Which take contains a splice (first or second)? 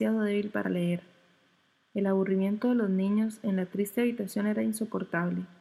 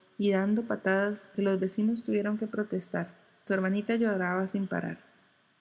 second